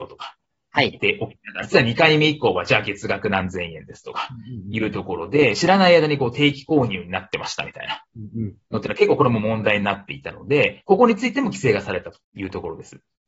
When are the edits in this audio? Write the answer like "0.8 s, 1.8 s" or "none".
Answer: 1.6 s, 12.2 s